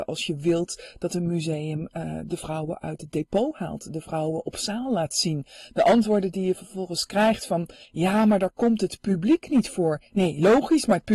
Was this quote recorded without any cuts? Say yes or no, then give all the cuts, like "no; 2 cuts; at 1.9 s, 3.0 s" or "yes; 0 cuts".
yes; 0 cuts